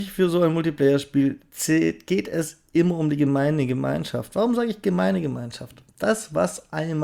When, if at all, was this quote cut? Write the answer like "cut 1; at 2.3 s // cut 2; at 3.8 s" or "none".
none